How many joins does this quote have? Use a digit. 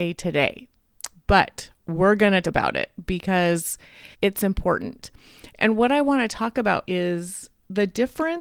3